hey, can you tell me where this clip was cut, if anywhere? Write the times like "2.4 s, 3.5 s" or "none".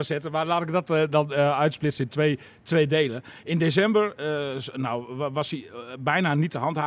none

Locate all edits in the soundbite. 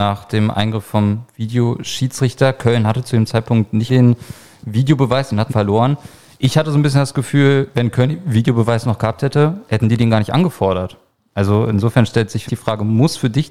3.9 s, 5.5 s, 12.5 s

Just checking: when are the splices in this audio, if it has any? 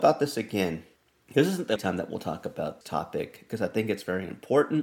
1.0 s, 1.8 s, 2.8 s

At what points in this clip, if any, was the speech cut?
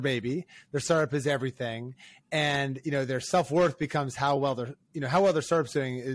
none

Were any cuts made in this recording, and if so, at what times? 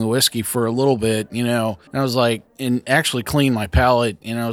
1.9 s, 2.5 s

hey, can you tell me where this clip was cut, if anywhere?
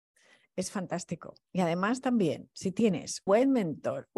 3.3 s

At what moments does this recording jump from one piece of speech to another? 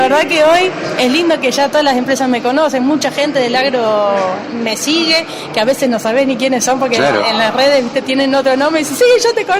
none

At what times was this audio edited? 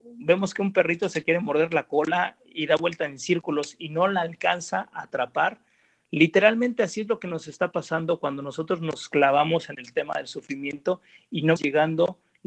11.6 s

